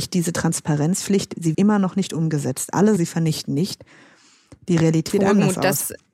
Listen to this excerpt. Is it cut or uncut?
cut